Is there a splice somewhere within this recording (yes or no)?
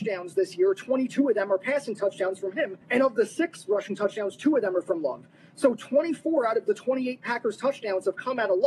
yes